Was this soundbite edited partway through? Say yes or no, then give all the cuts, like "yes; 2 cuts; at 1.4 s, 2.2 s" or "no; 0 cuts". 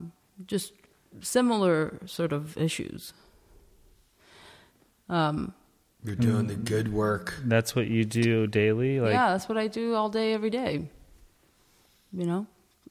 no; 0 cuts